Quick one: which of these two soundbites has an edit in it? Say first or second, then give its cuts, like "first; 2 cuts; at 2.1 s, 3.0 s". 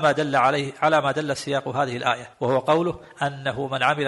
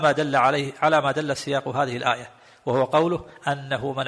first; 1 cut; at 2.3 s